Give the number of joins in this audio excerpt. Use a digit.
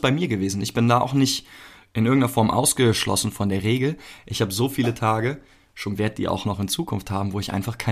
1